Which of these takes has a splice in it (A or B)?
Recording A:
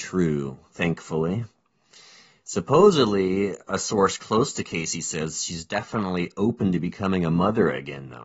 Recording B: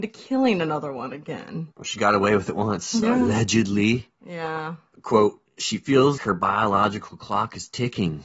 B